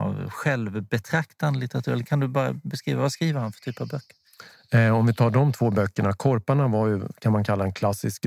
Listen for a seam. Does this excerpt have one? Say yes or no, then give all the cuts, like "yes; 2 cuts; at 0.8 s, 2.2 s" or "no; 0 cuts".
no; 0 cuts